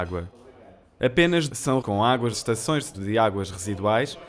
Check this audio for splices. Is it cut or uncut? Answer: cut